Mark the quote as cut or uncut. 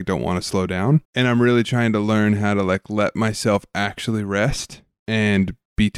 cut